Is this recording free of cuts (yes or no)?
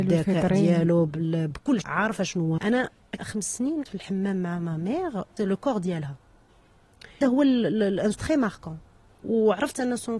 no